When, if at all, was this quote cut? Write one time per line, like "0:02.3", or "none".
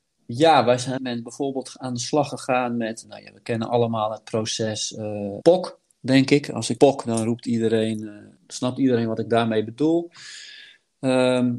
0:01.0
0:03.0
0:05.4
0:06.8
0:08.4

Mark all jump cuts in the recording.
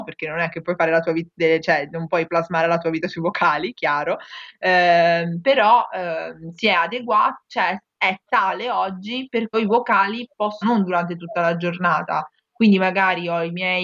0:09.5
0:10.6

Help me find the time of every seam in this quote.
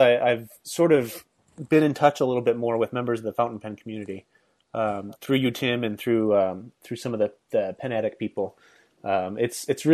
none

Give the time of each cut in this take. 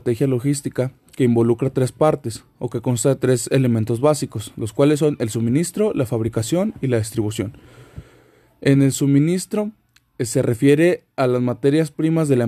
none

